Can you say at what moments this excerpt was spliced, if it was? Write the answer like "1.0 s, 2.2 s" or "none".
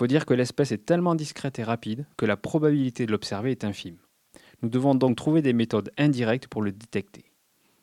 none